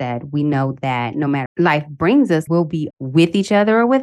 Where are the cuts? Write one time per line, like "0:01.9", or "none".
0:01.5
0:02.5
0:02.9

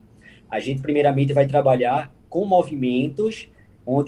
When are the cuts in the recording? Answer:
none

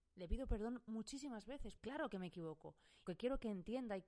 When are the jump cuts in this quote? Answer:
0:01.8
0:03.1

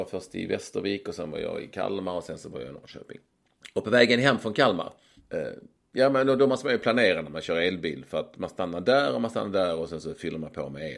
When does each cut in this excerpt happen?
none

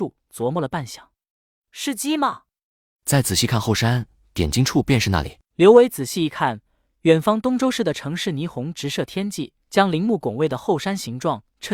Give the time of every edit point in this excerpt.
0:05.4
0:09.6

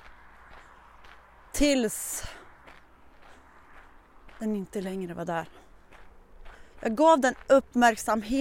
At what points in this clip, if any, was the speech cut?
0:06.7

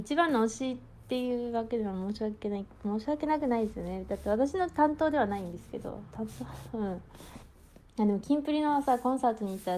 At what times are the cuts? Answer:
0:07.9

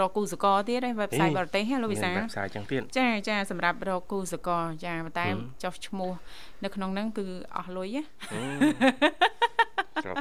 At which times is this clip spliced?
none

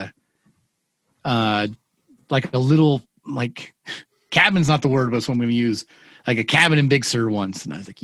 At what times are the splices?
none

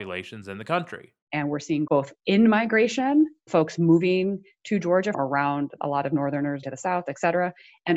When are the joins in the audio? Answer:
0:01.9
0:03.5
0:05.1
0:05.8
0:06.6

